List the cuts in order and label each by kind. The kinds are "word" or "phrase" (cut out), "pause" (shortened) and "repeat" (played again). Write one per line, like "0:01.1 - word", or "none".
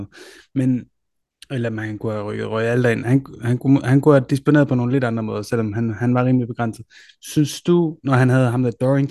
none